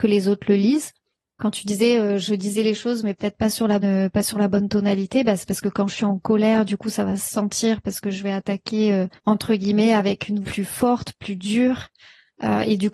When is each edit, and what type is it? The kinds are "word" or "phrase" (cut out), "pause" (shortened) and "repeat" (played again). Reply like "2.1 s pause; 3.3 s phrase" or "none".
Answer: 1.2 s pause; 3.8 s word; 9.2 s pause; 10.4 s word